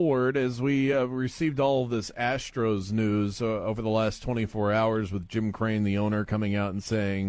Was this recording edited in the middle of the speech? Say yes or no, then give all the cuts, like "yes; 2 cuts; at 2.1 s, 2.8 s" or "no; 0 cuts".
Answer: no; 0 cuts